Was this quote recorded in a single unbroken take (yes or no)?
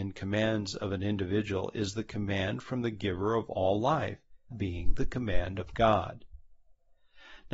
no